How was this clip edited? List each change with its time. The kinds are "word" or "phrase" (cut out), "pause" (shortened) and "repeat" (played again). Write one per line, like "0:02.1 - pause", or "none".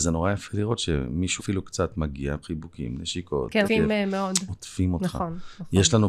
0:01.4 - word
0:02.4 - word
0:03.6 - word